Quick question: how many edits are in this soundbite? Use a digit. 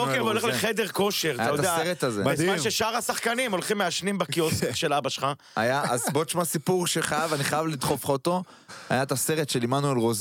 0